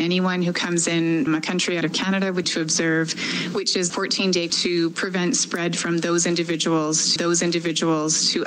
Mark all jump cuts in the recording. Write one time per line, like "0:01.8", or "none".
0:01.3
0:01.8
0:02.4
0:03.9
0:04.5
0:07.2